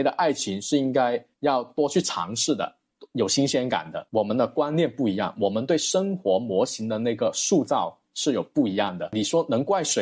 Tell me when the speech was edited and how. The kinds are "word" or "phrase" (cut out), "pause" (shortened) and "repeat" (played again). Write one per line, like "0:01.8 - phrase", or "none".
0:01.3 - pause